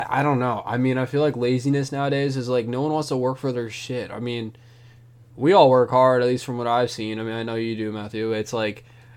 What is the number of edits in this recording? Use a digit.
0